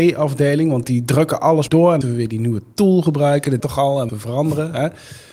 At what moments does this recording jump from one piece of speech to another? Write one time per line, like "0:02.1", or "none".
0:01.7
0:02.0
0:03.6
0:04.1